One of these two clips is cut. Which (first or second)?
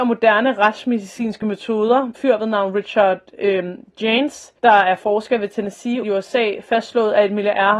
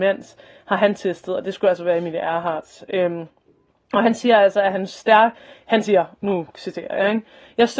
first